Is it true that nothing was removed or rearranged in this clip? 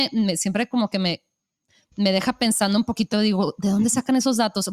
yes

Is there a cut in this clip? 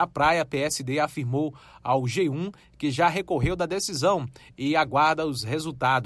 no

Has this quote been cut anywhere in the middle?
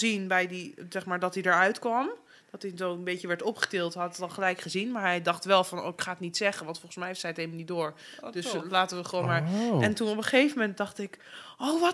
no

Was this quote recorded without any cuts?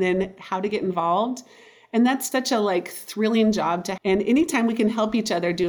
no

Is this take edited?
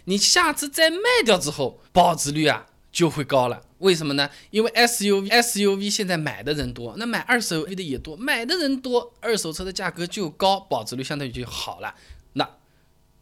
yes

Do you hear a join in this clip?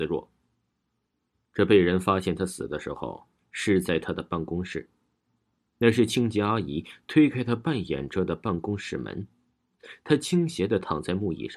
no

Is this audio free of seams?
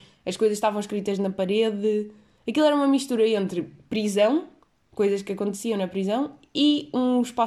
yes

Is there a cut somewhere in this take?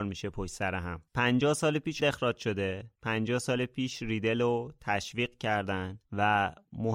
yes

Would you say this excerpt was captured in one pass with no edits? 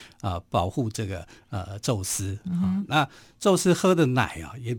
yes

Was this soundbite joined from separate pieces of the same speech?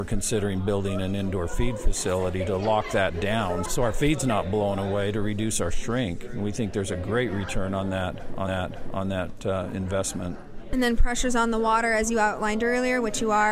yes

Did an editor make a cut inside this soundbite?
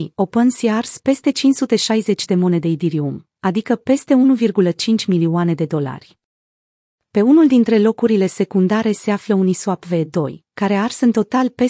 no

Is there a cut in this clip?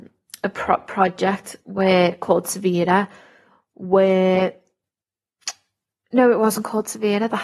no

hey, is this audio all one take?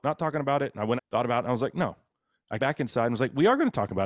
no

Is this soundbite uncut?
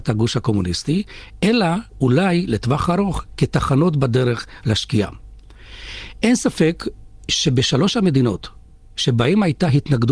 yes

